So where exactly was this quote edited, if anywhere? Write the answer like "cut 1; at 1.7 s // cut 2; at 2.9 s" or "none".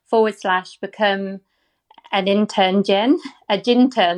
none